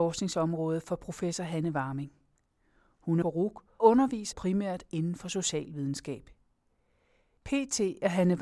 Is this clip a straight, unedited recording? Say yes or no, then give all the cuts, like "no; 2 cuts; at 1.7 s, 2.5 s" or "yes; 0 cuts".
no; 3 cuts; at 3.2 s, 3.8 s, 4.3 s